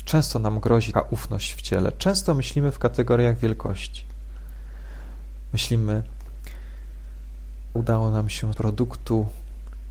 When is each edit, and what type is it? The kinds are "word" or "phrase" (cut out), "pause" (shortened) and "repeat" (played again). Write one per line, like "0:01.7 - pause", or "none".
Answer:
0:00.9 - word
0:07.8 - phrase
0:08.5 - word